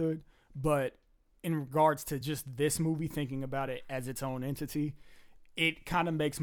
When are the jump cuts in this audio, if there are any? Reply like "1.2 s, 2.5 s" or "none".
none